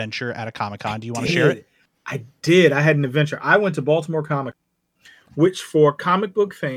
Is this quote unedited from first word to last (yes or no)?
yes